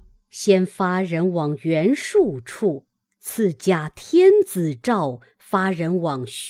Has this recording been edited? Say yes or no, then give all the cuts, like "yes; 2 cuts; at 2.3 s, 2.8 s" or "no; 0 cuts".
no; 0 cuts